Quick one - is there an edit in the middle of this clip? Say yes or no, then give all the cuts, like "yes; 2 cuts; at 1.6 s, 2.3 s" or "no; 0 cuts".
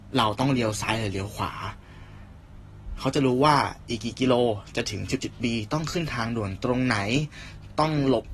yes; 1 cut; at 5.2 s